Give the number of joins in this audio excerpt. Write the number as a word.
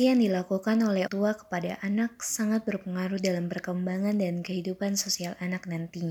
one